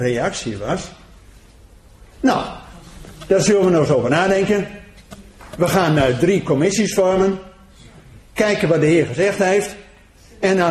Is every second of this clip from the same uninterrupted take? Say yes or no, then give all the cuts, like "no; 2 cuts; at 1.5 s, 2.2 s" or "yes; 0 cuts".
no; 1 cut; at 2.1 s